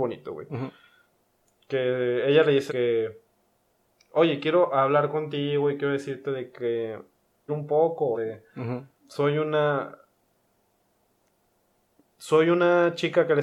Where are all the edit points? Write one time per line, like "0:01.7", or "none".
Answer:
0:02.7
0:07.5
0:08.1
0:09.0